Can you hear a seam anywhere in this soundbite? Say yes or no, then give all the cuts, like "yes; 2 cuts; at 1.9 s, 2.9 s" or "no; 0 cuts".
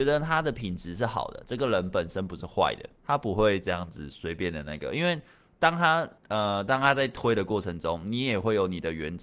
yes; 2 cuts; at 3.0 s, 6.2 s